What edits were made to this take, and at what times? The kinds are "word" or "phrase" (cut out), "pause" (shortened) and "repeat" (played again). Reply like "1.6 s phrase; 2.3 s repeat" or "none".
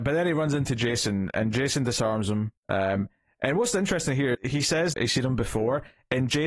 2.6 s pause; 4.3 s word; 4.9 s phrase

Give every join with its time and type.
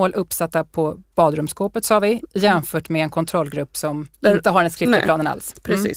4.1 s pause

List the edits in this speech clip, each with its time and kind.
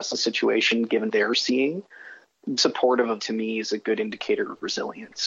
1.1 s word; 2.6 s word; 3.2 s word

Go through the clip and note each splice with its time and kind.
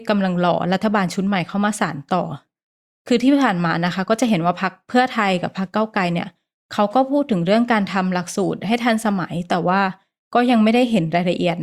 none

